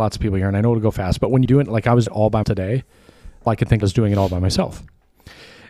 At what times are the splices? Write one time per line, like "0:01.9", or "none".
0:01.5
0:02.1
0:02.4
0:03.5
0:03.8